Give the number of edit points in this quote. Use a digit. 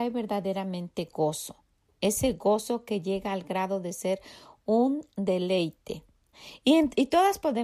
0